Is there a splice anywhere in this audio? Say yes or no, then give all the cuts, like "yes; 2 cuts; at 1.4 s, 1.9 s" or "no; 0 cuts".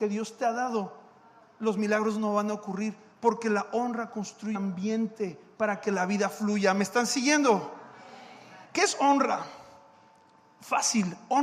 yes; 2 cuts; at 4.5 s, 8.6 s